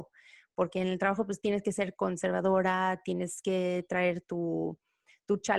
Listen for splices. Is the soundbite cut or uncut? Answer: uncut